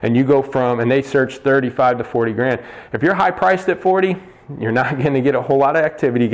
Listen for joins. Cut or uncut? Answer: uncut